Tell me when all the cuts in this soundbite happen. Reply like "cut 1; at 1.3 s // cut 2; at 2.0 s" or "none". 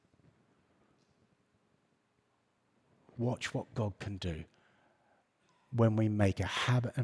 none